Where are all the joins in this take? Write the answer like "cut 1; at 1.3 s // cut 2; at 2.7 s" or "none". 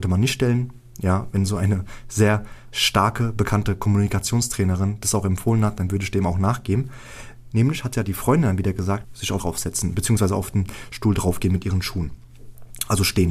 cut 1; at 9.0 s // cut 2; at 9.4 s